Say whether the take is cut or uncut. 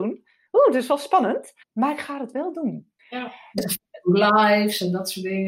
cut